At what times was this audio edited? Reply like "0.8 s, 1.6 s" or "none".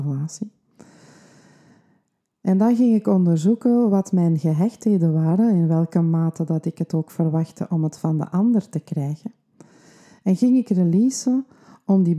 none

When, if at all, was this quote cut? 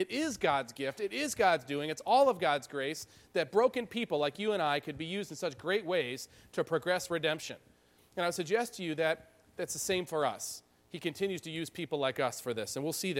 none

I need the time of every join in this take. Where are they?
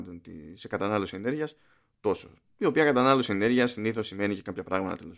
none

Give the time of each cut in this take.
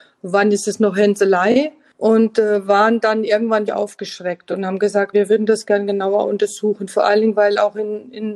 3.7 s, 5.1 s

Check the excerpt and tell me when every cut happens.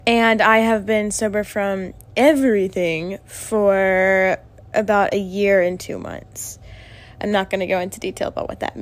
none

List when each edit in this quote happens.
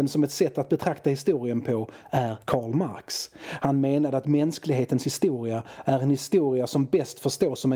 2.4 s

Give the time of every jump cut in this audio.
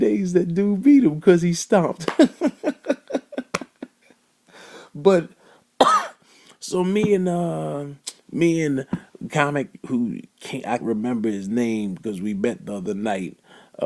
10.3 s, 10.8 s

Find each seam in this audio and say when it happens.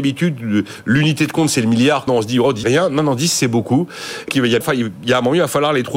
2.1 s, 2.6 s, 4.3 s, 4.6 s

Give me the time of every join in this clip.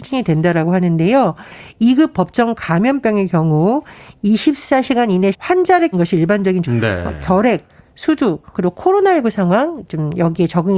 5.3 s, 5.9 s, 6.6 s, 8.5 s

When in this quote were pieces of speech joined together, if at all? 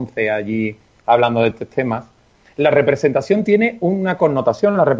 1.5 s

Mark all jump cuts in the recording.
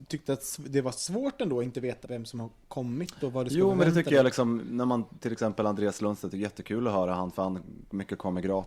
2.0 s

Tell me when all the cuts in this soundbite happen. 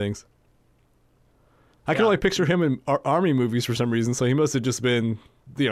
none

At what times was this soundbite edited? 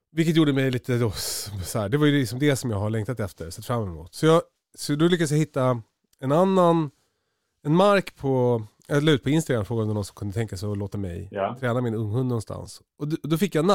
none

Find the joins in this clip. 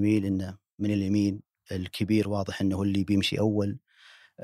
none

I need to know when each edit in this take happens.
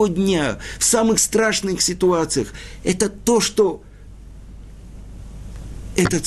none

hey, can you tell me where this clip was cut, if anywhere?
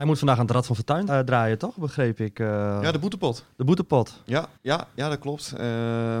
1.1 s, 4.6 s

